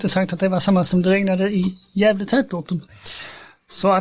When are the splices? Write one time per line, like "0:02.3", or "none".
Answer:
none